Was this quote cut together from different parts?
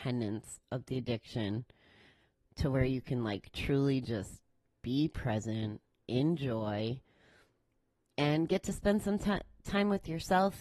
no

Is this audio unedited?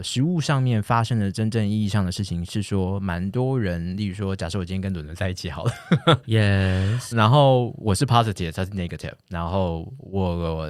no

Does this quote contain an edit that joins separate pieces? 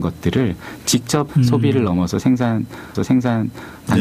yes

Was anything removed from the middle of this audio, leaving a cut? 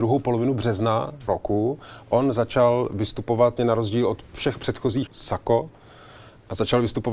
yes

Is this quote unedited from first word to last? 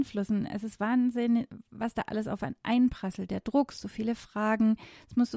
yes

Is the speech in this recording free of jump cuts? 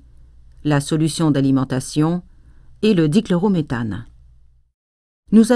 yes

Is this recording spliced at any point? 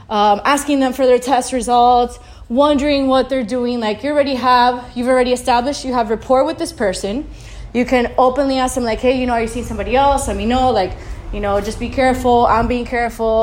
no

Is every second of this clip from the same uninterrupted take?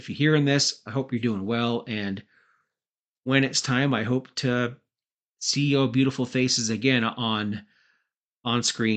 yes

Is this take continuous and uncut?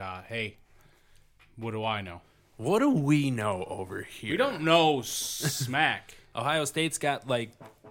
yes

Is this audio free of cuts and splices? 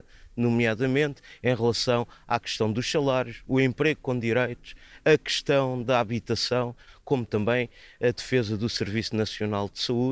yes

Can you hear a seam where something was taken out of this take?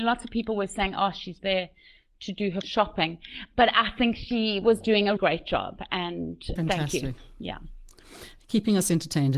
yes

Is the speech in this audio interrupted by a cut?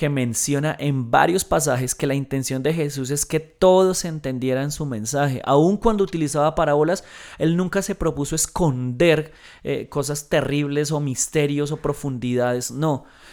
no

